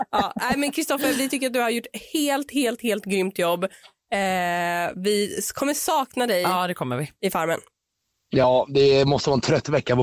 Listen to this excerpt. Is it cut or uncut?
uncut